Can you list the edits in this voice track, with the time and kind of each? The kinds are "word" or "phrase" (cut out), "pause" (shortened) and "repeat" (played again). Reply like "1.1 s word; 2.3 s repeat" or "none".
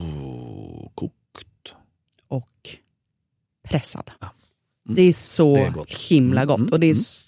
4.1 s pause

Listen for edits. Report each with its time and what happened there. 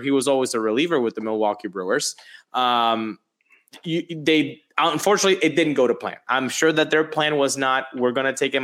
none

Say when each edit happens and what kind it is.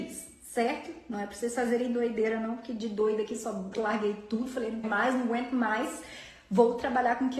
3.7 s phrase; 4.8 s word

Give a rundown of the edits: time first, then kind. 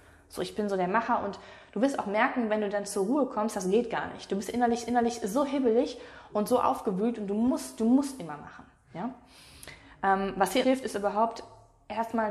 4.9 s repeat; 10.6 s word

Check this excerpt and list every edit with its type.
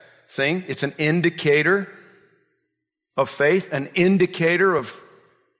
none

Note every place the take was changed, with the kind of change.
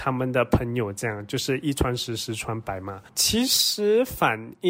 3.1 s pause

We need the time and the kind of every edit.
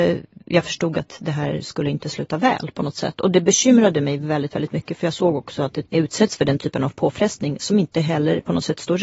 5.9 s phrase

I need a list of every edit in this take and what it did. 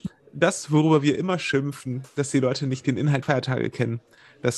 3.2 s word

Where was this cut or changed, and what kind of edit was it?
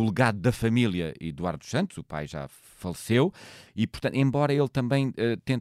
none

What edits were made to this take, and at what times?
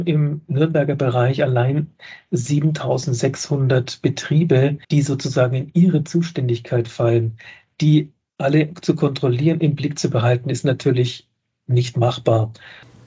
4.8 s pause; 8.3 s pause

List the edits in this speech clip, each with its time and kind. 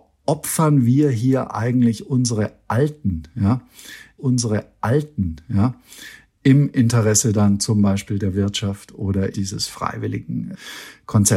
4.2 s repeat; 9.3 s word

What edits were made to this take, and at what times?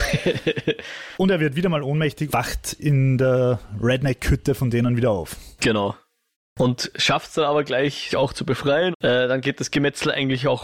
1.1 s word; 2.3 s word; 2.8 s word; 6.3 s pause; 8.1 s word; 8.9 s word

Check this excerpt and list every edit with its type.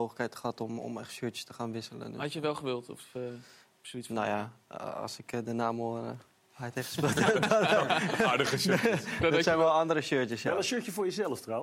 none

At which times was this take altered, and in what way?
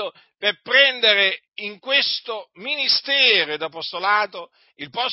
1.5 s pause

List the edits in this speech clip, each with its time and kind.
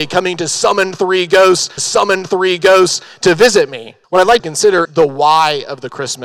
1.8 s repeat; 4.0 s pause; 4.4 s phrase; 4.8 s word

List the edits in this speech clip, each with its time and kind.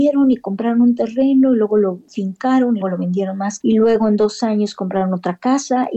2.8 s word; 3.6 s word

